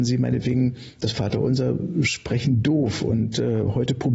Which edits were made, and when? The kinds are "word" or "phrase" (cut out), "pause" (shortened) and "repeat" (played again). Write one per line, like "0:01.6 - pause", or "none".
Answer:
none